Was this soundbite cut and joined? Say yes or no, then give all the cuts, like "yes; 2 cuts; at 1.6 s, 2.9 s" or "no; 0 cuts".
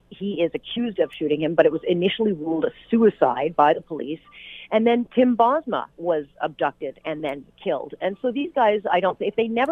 no; 0 cuts